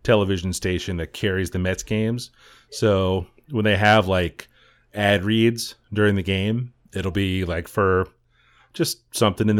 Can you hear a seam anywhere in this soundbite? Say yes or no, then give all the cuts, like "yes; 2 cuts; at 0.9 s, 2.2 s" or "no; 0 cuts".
no; 0 cuts